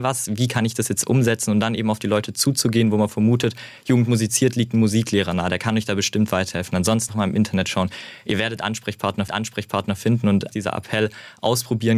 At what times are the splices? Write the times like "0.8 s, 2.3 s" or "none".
7.1 s, 9.3 s, 10.5 s